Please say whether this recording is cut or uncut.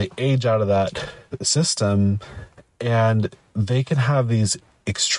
uncut